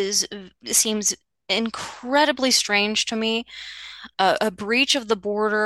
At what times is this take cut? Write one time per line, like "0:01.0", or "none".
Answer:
none